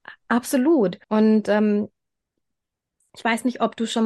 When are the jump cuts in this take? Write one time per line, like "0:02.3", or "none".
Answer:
0:01.0

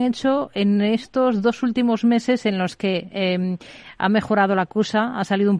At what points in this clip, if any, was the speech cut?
none

